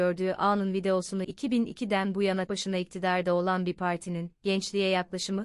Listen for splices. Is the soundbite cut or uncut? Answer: cut